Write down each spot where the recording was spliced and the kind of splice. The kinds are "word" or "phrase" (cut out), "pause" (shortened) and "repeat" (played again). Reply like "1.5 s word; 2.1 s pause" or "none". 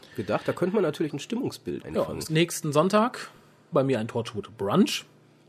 1.1 s word; 1.8 s word; 2.3 s word; 3.7 s word